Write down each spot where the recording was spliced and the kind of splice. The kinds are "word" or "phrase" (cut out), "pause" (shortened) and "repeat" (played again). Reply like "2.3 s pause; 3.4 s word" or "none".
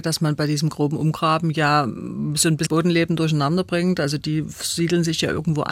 2.7 s word

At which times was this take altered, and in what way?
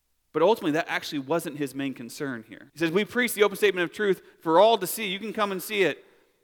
2.7 s pause

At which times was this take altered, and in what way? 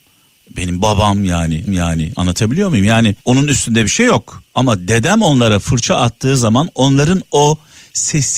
1.7 s repeat; 3.2 s pause; 4.5 s pause

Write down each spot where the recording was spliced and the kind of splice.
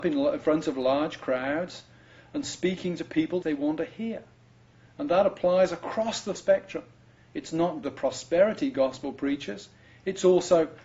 3.4 s word; 6.4 s word; 7.8 s phrase

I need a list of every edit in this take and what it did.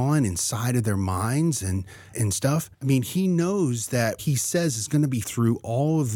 2.1 s word; 2.7 s pause; 4.2 s word; 5.2 s word

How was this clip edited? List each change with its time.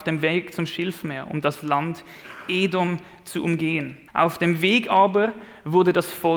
4.1 s pause

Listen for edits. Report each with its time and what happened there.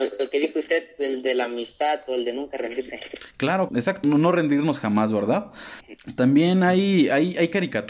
3.7 s word; 4.0 s word

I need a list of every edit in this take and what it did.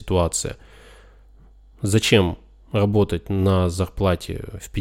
none

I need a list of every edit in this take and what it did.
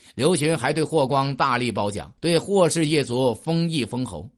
2.2 s pause

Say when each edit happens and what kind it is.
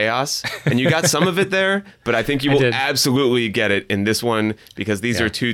none

